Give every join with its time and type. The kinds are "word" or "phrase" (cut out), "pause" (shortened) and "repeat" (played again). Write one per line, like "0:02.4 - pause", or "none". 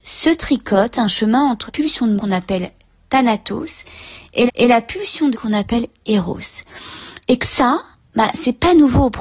0:01.7 - word
0:02.2 - word
0:04.5 - repeat
0:05.3 - word
0:07.4 - word